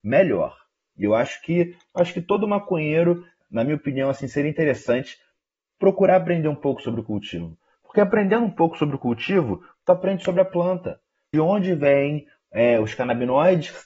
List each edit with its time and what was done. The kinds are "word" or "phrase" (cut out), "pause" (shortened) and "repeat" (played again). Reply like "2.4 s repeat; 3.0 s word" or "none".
11.3 s phrase